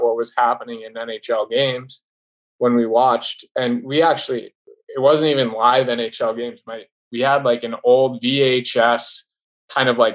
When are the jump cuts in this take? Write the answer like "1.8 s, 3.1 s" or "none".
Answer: none